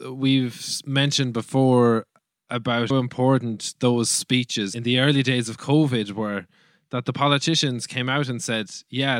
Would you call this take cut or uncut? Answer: cut